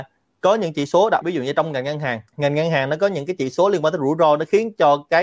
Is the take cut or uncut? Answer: cut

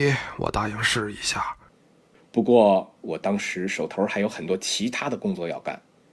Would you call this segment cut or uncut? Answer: uncut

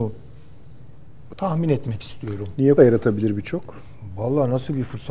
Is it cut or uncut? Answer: cut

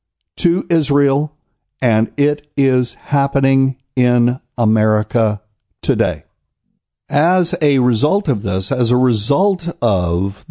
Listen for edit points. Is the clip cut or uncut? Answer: uncut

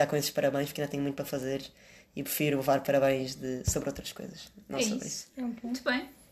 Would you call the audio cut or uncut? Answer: uncut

